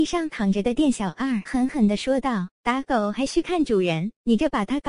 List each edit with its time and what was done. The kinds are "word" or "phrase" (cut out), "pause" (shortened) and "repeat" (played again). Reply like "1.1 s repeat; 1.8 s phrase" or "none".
1.5 s word